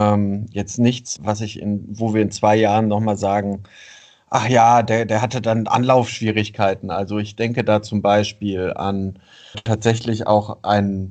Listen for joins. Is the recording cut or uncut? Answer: cut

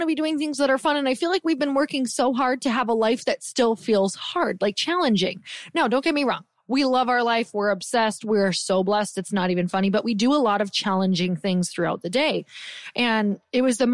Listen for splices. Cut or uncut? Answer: uncut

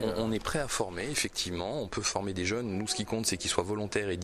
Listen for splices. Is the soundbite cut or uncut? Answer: uncut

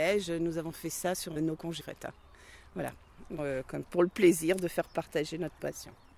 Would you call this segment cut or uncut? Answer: cut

